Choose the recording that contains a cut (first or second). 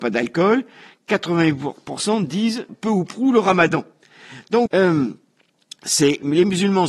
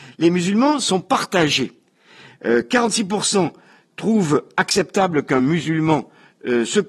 first